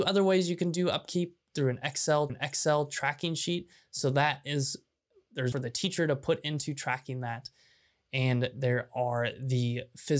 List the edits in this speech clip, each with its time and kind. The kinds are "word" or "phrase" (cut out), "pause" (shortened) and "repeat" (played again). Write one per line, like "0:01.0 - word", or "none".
0:02.3 - repeat
0:05.5 - phrase